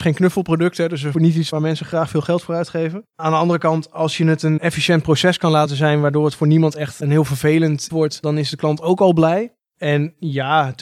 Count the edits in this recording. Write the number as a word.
two